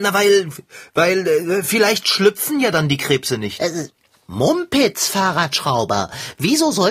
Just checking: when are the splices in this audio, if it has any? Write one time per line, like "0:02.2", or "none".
none